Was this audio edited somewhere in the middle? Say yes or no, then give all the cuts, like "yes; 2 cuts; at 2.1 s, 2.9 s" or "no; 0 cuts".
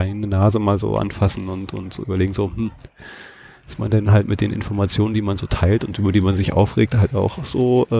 no; 0 cuts